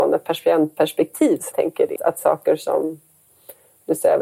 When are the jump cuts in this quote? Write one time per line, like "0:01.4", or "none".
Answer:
0:01.5
0:02.0